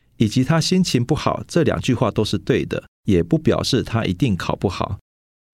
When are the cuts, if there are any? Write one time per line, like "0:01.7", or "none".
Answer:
0:02.9